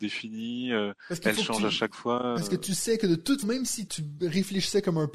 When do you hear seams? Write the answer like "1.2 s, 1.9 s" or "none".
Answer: 3.4 s, 3.9 s